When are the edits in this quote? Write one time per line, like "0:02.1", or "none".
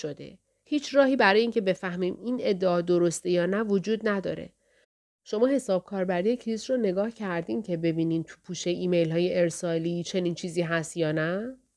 none